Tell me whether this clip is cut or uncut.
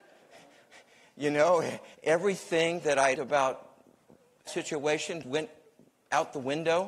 cut